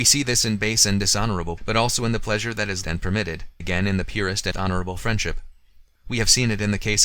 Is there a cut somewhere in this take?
yes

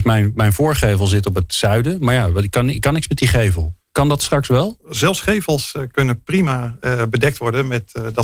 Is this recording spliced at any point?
yes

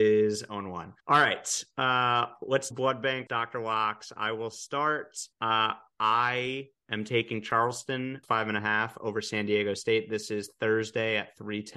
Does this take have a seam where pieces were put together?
yes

